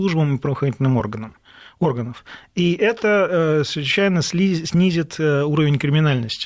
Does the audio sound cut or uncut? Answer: uncut